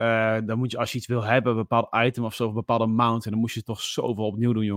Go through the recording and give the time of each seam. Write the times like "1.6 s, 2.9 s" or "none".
none

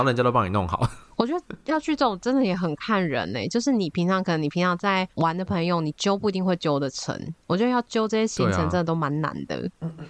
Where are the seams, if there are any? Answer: 5.1 s

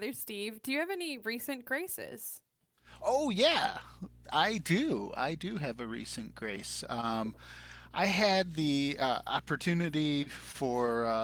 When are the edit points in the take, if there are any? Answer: none

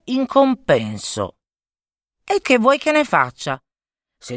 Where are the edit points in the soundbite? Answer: 2.4 s

